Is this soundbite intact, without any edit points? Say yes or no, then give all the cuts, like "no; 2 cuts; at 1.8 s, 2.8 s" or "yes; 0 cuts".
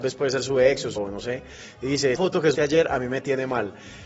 no; 3 cuts; at 1.0 s, 2.1 s, 2.5 s